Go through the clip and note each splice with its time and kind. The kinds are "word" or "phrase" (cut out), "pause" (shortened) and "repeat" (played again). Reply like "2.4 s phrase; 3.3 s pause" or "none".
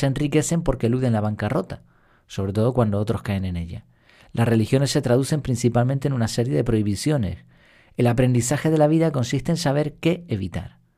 none